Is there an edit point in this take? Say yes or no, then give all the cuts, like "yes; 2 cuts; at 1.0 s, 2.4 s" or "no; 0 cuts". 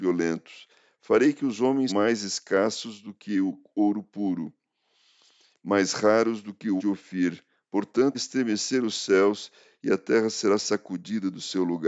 yes; 3 cuts; at 1.9 s, 6.8 s, 8.1 s